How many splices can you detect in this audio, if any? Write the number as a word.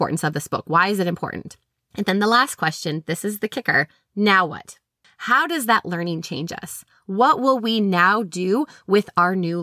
zero